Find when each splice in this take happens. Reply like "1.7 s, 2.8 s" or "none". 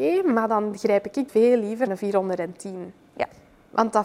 1.3 s, 1.9 s